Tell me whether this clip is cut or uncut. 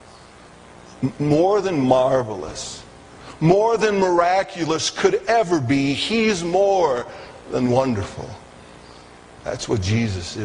uncut